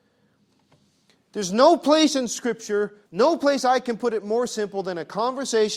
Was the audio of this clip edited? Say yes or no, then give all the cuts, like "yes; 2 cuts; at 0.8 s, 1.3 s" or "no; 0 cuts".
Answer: yes; 1 cut; at 3.1 s